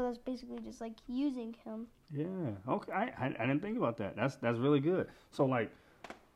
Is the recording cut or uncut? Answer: uncut